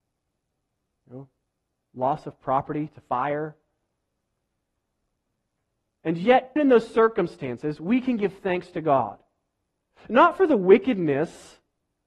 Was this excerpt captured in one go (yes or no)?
no